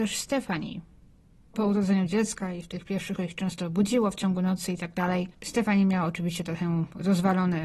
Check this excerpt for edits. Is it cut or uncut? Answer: cut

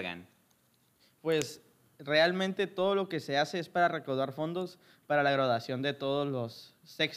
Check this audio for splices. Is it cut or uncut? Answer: uncut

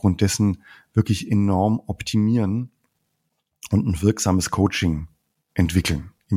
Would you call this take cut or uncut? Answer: uncut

